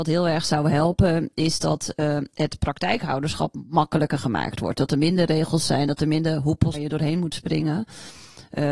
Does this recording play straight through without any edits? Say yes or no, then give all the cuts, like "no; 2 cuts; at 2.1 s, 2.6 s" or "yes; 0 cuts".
no; 1 cut; at 6.7 s